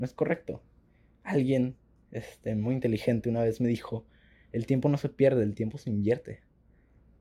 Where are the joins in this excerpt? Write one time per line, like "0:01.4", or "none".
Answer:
none

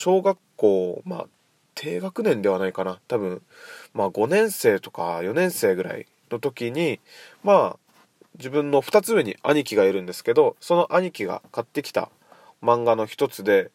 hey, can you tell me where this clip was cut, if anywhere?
none

